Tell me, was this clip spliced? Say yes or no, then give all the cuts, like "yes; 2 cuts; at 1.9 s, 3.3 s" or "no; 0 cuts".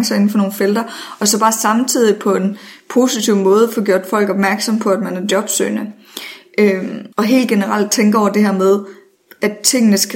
yes; 2 cuts; at 7.1 s, 9.2 s